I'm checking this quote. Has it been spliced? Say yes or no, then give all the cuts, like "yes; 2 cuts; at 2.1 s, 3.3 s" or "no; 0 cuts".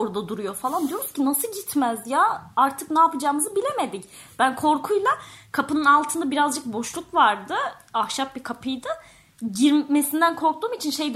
no; 0 cuts